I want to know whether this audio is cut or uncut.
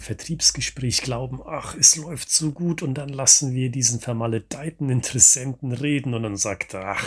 uncut